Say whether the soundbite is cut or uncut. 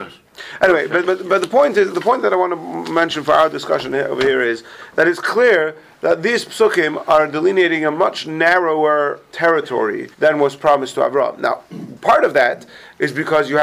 cut